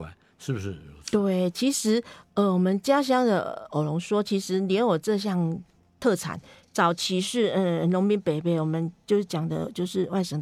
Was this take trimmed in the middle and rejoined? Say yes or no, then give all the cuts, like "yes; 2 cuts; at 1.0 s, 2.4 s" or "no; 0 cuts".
no; 0 cuts